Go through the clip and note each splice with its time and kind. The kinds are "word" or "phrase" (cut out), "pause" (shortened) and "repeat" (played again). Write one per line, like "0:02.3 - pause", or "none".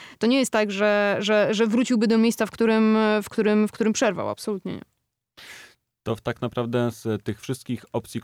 none